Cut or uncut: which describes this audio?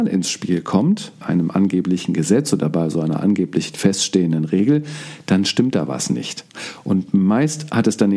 cut